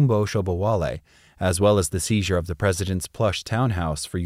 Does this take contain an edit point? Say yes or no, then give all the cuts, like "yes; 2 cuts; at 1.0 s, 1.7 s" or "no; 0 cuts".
no; 0 cuts